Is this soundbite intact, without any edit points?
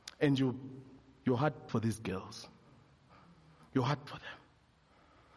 no; 2 cuts; at 1.7 s, 4.1 s

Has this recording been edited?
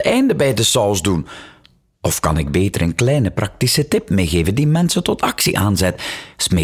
no; 0 cuts

